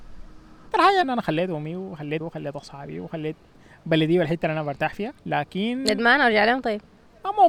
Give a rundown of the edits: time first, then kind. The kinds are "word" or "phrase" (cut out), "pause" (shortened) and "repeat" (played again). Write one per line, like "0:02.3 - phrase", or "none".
0:01.0 - phrase
0:02.2 - word
0:05.2 - pause